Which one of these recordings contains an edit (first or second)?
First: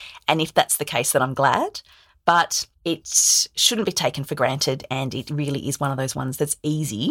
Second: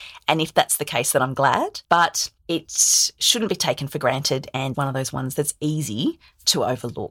second